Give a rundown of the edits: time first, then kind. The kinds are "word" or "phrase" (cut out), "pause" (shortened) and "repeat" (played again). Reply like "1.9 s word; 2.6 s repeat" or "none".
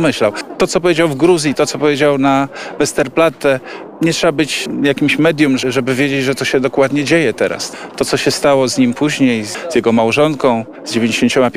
none